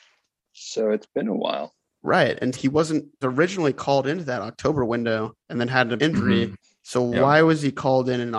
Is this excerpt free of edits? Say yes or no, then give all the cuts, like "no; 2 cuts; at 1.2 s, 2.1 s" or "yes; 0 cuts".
no; 4 cuts; at 2.5 s, 3.2 s, 5.4 s, 6.0 s